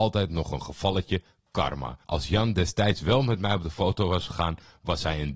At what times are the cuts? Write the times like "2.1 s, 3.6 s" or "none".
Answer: 2.0 s